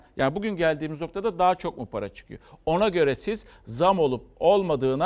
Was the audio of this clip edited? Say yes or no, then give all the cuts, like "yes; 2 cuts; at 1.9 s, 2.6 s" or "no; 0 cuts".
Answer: no; 0 cuts